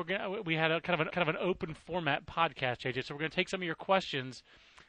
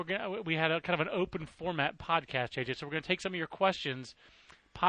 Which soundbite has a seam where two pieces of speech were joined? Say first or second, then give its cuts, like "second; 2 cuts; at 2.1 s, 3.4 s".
first; 1 cut; at 1.1 s